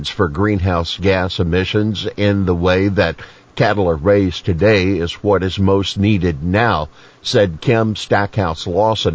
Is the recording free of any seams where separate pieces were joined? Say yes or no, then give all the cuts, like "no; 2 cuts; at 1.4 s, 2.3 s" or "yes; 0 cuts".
yes; 0 cuts